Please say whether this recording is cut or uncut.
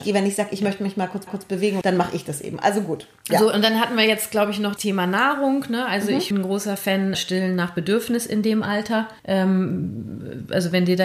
cut